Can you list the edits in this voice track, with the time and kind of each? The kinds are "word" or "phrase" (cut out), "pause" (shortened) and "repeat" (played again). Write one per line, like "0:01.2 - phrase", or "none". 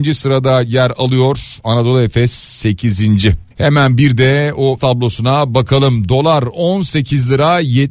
0:03.5 - pause
0:04.8 - word

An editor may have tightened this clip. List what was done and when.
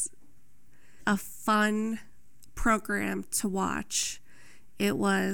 0:01.0 - word

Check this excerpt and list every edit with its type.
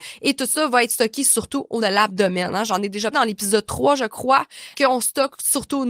0:01.8 - word
0:03.1 - word
0:04.7 - word

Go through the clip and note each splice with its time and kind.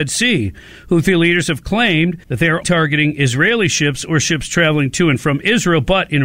0:02.2 - pause
0:02.6 - word

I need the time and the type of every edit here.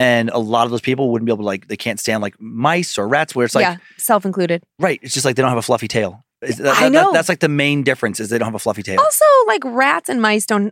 0:06.3 - pause

